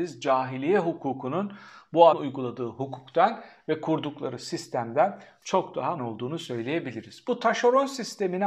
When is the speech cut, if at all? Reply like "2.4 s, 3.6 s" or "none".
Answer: 2.1 s, 6.0 s